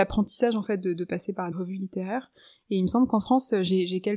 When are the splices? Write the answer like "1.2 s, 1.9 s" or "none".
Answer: 1.5 s